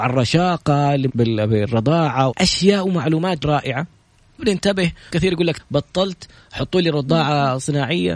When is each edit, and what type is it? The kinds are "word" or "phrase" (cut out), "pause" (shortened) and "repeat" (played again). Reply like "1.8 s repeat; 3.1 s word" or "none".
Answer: 1.1 s word; 2.3 s word; 3.4 s word; 4.4 s word; 5.1 s word; 5.6 s word